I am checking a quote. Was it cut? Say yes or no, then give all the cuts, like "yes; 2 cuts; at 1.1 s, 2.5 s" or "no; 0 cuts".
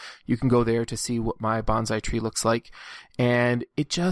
no; 0 cuts